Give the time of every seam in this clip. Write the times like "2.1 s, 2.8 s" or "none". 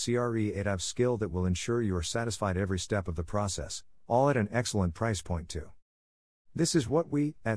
none